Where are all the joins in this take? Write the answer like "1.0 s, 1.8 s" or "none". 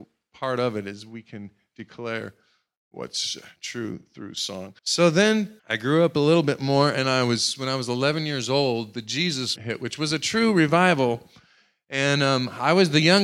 4.8 s, 5.6 s, 9.6 s